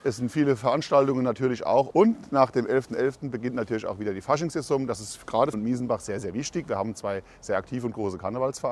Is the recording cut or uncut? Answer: cut